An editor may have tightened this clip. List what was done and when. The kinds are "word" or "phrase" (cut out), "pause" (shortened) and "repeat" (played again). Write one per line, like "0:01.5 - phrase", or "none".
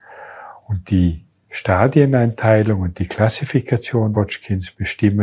0:04.1 - word